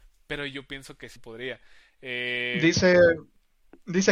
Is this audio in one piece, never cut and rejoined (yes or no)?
no